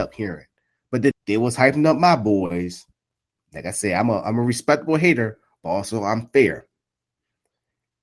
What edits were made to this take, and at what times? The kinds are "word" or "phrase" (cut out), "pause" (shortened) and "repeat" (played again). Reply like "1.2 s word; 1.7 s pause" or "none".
1.1 s word